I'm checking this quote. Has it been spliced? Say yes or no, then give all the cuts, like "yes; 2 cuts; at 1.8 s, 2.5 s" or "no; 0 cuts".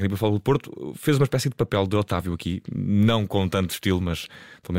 no; 0 cuts